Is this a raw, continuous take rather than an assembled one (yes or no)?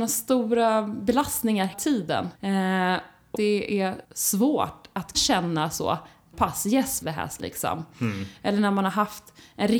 no